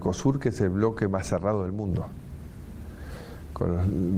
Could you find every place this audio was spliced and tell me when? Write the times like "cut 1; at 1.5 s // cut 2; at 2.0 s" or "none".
none